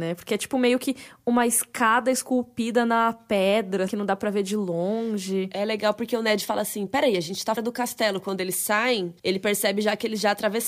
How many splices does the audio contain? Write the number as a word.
three